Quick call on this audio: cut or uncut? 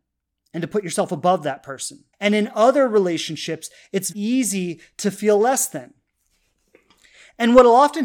cut